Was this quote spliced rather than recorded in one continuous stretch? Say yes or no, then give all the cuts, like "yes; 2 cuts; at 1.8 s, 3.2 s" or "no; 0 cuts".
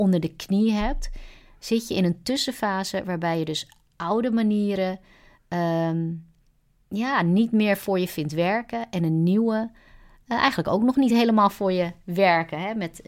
no; 0 cuts